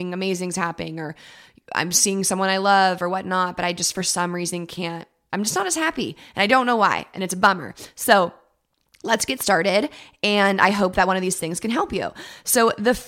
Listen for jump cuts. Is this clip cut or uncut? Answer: cut